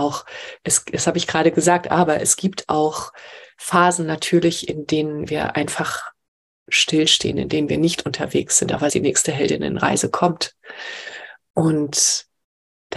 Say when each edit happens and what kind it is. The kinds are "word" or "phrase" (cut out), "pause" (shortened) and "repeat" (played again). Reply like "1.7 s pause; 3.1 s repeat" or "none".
8.9 s phrase